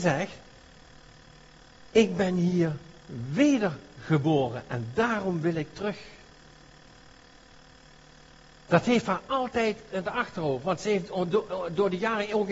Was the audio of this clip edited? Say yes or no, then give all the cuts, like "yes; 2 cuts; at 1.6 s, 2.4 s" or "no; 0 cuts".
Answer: no; 0 cuts